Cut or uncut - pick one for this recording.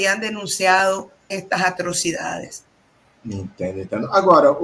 cut